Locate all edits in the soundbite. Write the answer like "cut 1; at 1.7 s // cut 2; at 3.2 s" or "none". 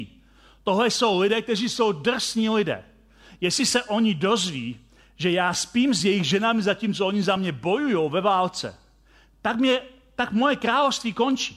none